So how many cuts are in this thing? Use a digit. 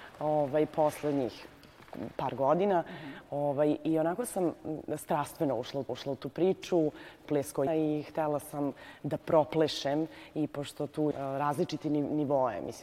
4